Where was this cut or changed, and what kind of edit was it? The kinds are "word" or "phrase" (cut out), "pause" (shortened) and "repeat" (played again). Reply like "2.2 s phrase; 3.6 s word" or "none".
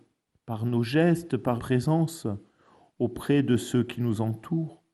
1.6 s word